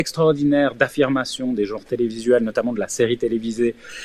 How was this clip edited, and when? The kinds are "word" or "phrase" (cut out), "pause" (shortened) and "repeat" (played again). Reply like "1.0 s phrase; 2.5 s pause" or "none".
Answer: none

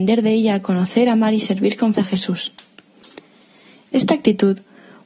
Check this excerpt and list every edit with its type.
2.0 s word

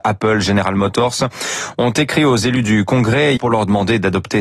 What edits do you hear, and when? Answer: 3.4 s word

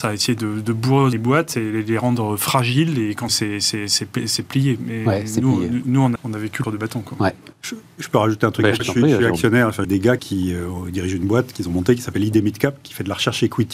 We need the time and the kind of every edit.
1.1 s word; 3.3 s phrase; 5.8 s word; 6.2 s phrase; 6.6 s word; 7.5 s pause; 8.8 s word; 9.8 s phrase; 10.2 s word

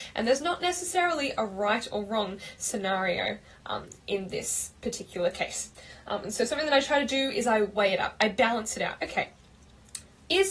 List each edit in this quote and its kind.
none

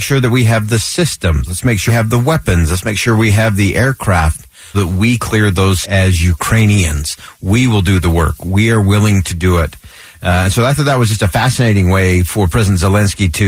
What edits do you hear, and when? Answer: 1.9 s word; 4.7 s word; 5.2 s word; 5.8 s word

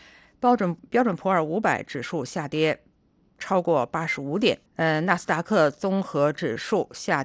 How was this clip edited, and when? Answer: 4.7 s pause

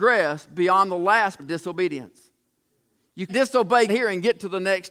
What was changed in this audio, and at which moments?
1.4 s word; 3.3 s word; 3.9 s word

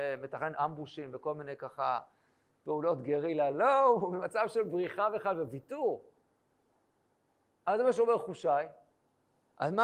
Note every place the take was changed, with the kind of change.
none

